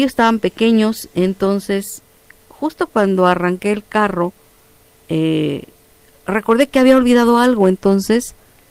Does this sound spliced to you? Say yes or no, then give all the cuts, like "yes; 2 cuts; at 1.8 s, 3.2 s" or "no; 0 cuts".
no; 0 cuts